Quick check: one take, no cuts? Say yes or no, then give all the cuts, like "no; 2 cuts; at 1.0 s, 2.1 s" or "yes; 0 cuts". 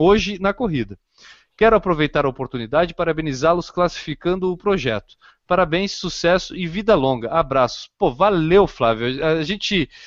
yes; 0 cuts